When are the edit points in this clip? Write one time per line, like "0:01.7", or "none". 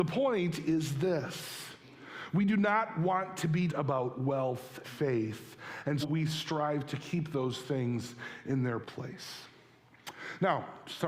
0:03.7
0:04.8
0:06.0
0:08.8